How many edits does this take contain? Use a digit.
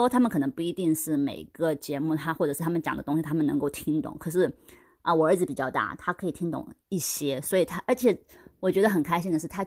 0